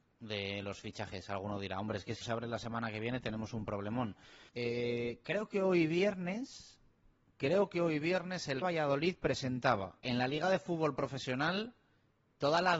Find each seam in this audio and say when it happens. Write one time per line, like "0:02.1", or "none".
0:02.2
0:04.5
0:08.6
0:10.0